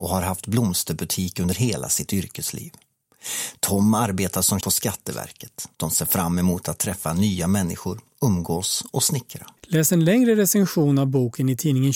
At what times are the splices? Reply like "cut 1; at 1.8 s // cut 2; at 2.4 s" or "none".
cut 1; at 4.6 s // cut 2; at 5.7 s // cut 3; at 9.6 s